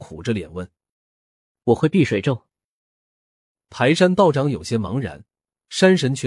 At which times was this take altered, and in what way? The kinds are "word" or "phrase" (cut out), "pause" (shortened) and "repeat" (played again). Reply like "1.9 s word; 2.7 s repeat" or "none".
0.9 s pause